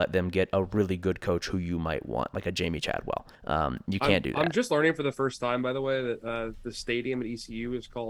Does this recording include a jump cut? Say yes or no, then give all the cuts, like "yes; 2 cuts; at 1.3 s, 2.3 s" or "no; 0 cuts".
yes; 1 cut; at 3.3 s